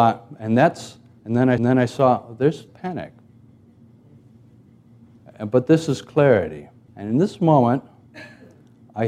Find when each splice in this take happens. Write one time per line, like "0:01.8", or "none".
0:01.6
0:02.7
0:06.9

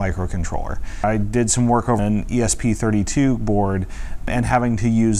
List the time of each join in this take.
0:02.0

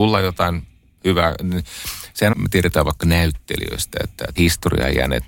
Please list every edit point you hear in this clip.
0:02.3
0:04.4

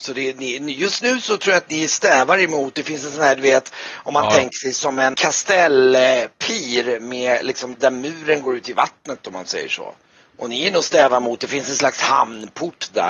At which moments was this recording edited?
0:05.1
0:07.7

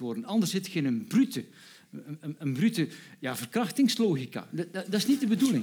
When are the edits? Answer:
none

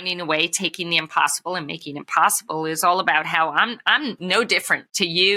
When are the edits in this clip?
none

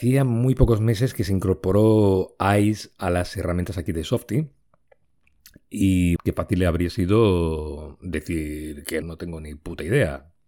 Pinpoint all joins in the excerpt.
0:06.2
0:09.0

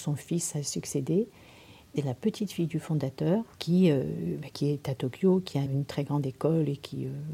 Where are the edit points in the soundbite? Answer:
0:02.0
0:03.5
0:04.5
0:05.7

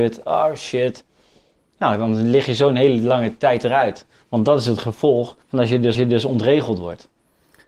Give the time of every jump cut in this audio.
0:05.4
0:05.9

